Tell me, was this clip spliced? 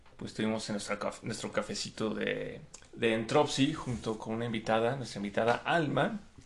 yes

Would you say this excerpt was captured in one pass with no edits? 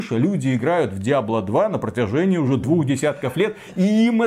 yes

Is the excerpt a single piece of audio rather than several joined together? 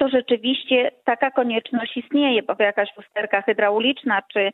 no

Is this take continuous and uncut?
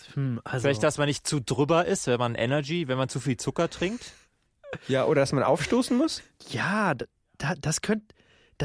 yes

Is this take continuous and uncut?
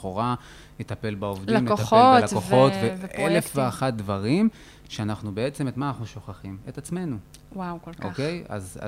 yes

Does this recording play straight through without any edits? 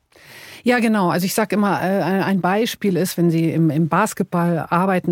yes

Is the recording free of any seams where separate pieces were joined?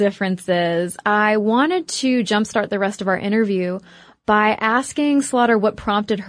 yes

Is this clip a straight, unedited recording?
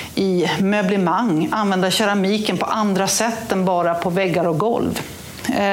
yes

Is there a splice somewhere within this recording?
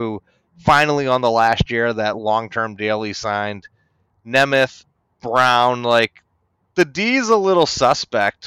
no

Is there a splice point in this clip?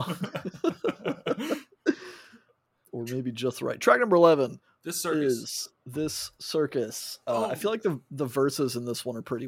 no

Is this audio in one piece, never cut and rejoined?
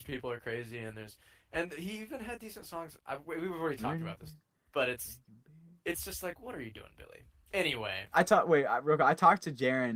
yes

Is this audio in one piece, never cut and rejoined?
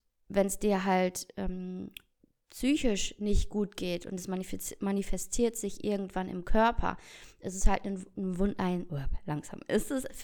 yes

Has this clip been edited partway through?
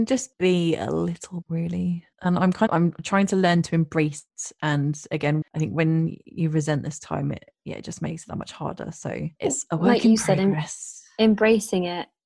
yes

